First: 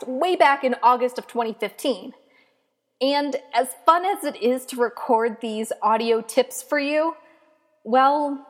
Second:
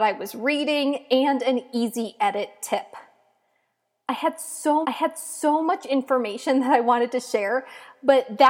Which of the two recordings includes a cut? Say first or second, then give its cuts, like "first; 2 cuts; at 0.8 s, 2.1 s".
second; 1 cut; at 4.8 s